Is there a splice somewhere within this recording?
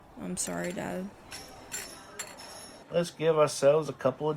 no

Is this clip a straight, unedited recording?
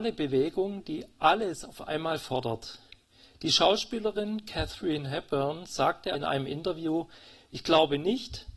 no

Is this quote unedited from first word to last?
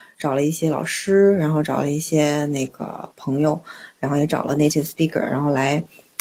yes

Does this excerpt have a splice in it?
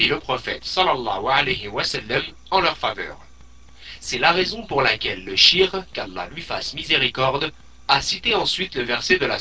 no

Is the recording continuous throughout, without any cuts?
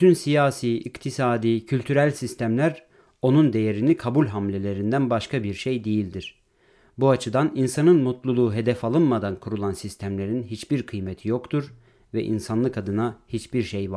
yes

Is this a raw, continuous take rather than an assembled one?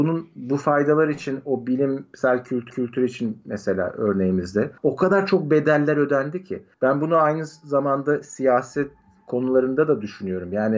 no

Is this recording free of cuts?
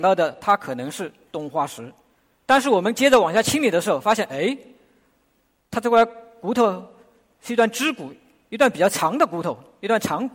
no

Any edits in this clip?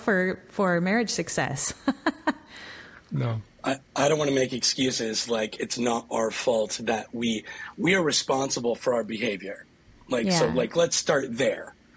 no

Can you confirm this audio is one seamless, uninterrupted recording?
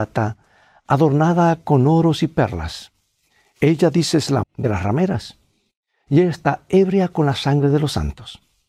no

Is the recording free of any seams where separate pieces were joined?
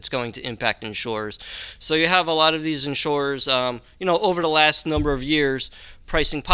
yes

